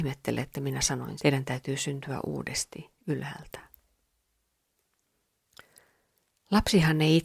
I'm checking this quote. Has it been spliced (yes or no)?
yes